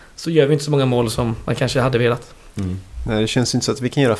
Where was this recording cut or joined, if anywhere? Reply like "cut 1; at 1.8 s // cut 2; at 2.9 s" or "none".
none